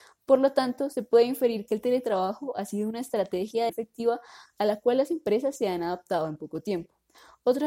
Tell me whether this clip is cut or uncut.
cut